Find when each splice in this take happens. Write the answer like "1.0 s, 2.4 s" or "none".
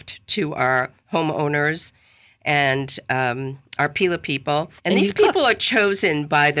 4.8 s